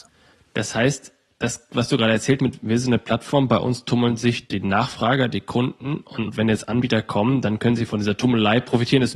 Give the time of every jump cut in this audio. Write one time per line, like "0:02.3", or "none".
0:02.4